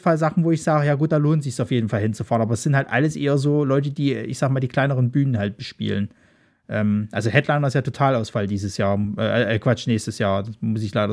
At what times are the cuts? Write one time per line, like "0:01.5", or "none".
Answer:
none